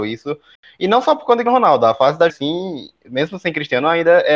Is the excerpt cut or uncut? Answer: cut